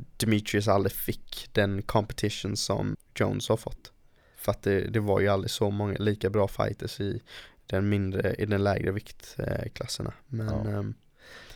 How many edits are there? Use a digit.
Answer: 2